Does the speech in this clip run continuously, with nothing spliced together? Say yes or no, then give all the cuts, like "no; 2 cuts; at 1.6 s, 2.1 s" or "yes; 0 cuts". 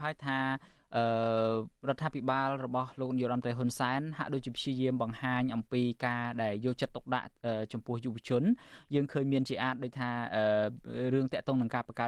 no; 1 cut; at 1.8 s